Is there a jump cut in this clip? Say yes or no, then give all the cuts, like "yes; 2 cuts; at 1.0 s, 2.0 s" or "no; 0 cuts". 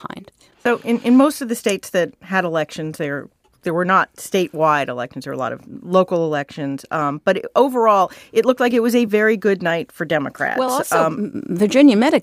no; 0 cuts